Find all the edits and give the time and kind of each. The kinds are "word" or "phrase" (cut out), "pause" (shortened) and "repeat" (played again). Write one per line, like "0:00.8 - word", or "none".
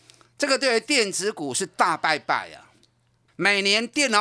none